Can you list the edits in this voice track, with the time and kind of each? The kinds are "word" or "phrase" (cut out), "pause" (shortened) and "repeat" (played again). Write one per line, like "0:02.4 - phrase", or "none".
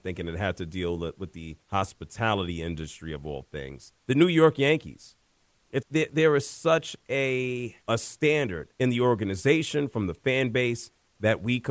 0:01.6 - pause
0:04.0 - pause
0:05.8 - word
0:07.8 - pause
0:08.7 - pause